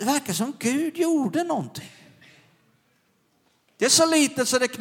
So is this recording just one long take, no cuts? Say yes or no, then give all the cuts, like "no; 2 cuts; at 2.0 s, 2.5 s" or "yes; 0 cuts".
yes; 0 cuts